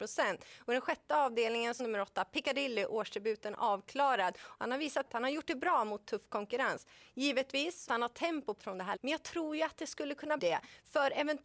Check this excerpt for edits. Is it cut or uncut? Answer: cut